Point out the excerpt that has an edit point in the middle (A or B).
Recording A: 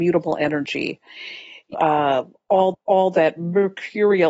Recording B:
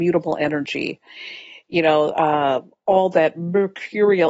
A